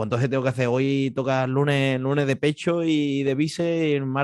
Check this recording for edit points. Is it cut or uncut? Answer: uncut